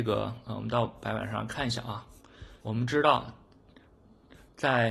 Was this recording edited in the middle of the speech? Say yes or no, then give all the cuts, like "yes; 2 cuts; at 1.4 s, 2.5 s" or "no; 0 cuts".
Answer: yes; 1 cut; at 2.6 s